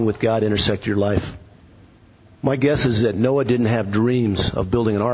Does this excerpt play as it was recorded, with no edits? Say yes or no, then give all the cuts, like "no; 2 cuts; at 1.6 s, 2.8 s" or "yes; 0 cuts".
no; 1 cut; at 1.6 s